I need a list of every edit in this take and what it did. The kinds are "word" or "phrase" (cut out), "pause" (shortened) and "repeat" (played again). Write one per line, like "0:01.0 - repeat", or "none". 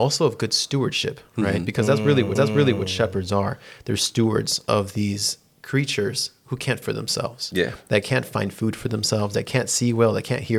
0:02.4 - repeat
0:06.8 - word